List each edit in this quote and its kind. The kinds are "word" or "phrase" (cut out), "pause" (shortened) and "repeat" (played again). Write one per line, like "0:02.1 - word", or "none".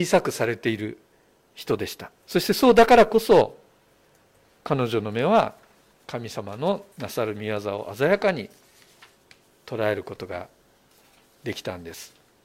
0:02.2 - pause
0:06.9 - pause